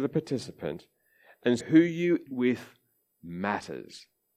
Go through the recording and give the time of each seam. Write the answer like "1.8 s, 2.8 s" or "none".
1.6 s, 2.3 s